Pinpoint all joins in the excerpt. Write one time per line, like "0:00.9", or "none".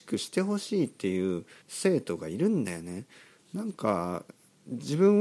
0:01.6